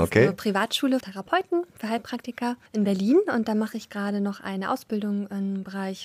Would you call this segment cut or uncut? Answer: cut